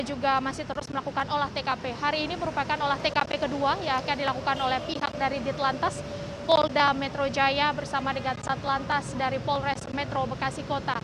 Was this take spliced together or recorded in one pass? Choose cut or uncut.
uncut